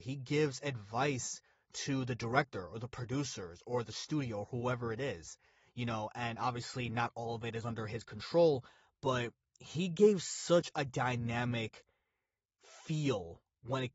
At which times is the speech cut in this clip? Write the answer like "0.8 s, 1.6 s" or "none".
none